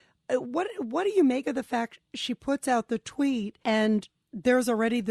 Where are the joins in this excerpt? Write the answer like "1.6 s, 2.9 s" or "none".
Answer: 3.6 s